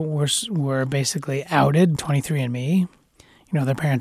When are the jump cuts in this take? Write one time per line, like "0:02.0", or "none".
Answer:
0:02.0